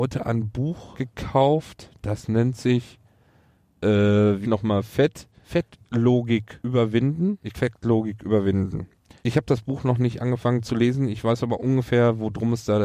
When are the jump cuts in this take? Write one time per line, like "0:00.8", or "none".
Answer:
0:04.4
0:07.5